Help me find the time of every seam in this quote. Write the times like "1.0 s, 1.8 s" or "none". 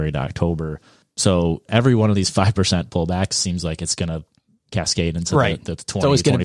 none